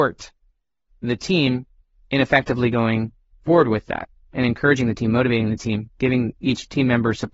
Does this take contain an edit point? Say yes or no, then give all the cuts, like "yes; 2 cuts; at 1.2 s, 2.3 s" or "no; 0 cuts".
no; 0 cuts